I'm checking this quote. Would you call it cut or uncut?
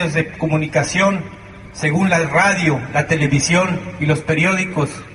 uncut